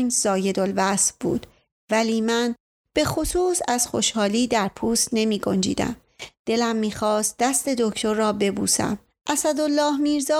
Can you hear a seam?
no; 0 cuts

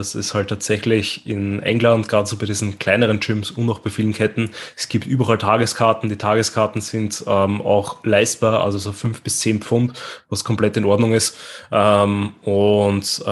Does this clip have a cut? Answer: no; 0 cuts

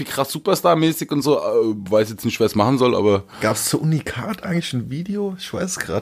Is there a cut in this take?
no; 0 cuts

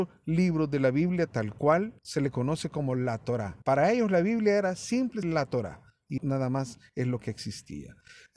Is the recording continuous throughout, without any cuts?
no; 4 cuts; at 2.0 s, 3.6 s, 5.2 s, 6.2 s

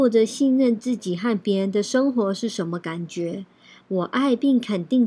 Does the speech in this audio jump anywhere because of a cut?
no; 0 cuts

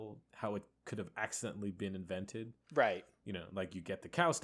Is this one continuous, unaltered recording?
yes; 0 cuts

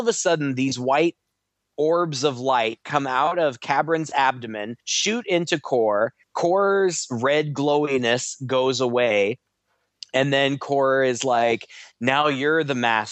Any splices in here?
yes; 2 cuts; at 4.8 s, 6.2 s

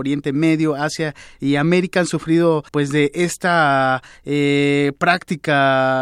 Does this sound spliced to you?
yes; 1 cut; at 2.7 s

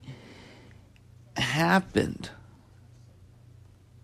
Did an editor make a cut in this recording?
yes; 1 cut; at 1.3 s

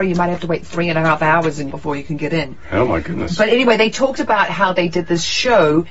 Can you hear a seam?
yes; 1 cut; at 1.7 s

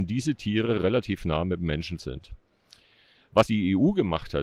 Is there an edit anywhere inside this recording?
yes; 2 cuts; at 2.0 s, 3.5 s

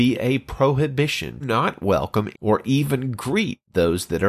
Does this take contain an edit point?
yes; 2 cuts; at 1.4 s, 2.3 s

